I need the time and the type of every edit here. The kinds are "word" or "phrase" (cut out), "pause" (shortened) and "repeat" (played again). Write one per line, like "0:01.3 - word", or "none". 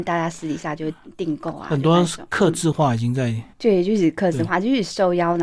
0:03.5 - pause